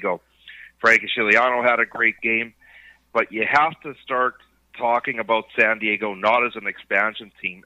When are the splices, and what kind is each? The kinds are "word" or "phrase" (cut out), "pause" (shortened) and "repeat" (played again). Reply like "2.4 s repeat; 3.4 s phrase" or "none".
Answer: none